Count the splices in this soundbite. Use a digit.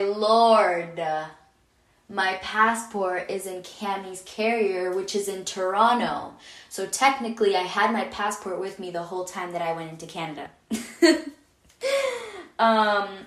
0